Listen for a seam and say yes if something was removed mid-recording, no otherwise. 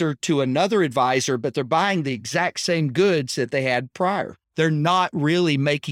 yes